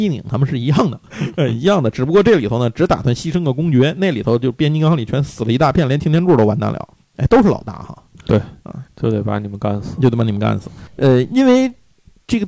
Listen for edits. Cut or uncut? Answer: cut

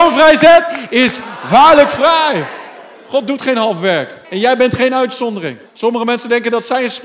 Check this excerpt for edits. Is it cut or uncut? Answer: cut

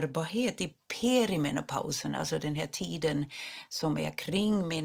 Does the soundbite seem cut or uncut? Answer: uncut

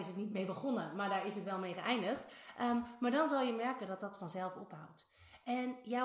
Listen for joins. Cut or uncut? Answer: uncut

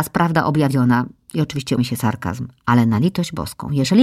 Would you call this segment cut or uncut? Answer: cut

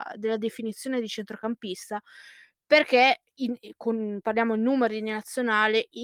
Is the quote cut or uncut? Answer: uncut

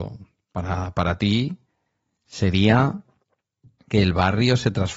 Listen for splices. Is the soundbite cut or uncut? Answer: uncut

